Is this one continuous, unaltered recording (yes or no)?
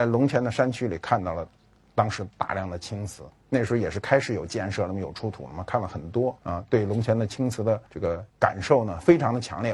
no